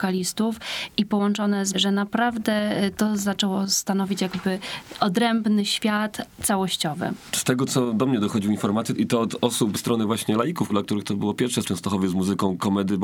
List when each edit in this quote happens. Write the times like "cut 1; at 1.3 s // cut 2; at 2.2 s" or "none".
cut 1; at 1.7 s // cut 2; at 9.8 s // cut 3; at 11.6 s